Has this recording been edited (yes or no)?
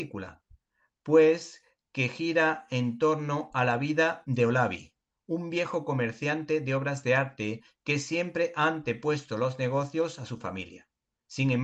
no